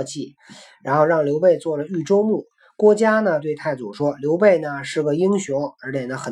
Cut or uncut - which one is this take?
uncut